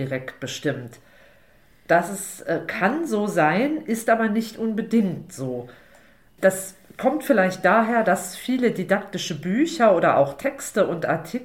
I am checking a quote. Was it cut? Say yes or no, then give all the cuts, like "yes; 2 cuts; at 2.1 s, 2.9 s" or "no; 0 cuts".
no; 0 cuts